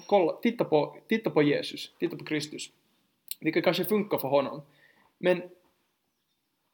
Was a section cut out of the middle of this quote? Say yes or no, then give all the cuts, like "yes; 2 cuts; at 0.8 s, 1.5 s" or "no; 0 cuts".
no; 0 cuts